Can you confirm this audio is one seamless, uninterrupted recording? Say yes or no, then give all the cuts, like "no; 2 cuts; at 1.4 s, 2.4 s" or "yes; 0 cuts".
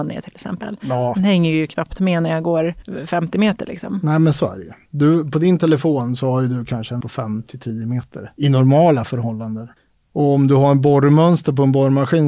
no; 1 cut; at 7.0 s